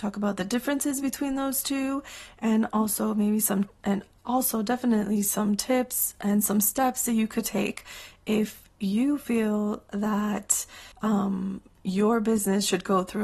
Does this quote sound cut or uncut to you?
cut